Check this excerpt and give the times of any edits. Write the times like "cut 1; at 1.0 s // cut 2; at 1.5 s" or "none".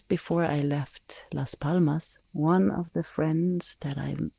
cut 1; at 2.2 s